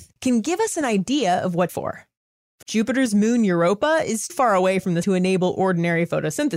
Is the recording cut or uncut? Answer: cut